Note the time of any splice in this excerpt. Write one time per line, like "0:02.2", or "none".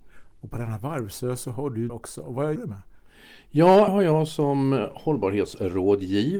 0:01.9
0:02.6
0:03.9